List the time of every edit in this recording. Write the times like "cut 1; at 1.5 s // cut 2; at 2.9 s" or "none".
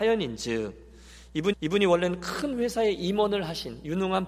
cut 1; at 1.5 s

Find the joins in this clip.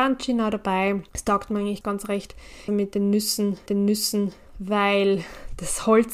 cut 1; at 1.1 s // cut 2; at 1.8 s // cut 3; at 2.7 s // cut 4; at 3.7 s

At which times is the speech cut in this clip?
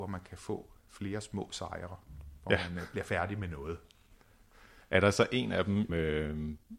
cut 1; at 4.8 s // cut 2; at 5.9 s

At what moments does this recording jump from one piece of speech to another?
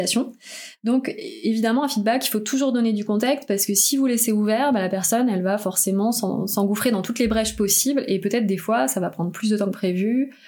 none

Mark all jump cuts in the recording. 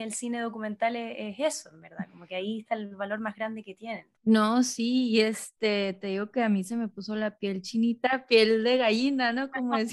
cut 1; at 4.2 s

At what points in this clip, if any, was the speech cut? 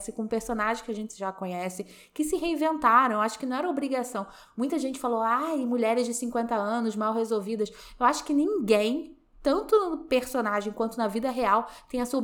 none

